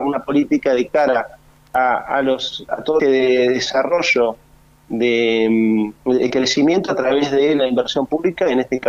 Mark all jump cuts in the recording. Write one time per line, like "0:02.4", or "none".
0:02.7
0:03.0